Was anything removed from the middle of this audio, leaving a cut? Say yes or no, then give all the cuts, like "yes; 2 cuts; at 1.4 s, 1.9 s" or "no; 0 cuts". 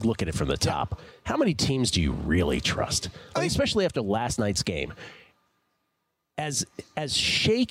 no; 0 cuts